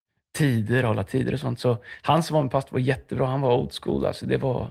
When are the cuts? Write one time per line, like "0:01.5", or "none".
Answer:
none